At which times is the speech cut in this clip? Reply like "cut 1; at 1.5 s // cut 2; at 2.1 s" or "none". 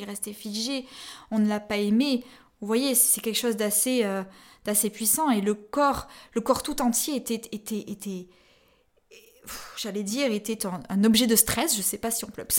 none